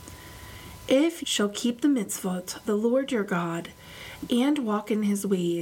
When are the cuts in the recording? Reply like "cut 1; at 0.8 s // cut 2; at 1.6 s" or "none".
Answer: cut 1; at 1.2 s // cut 2; at 2.6 s